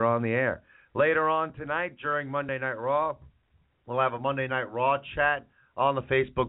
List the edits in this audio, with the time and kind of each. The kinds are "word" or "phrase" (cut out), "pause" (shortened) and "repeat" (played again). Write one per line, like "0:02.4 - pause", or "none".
none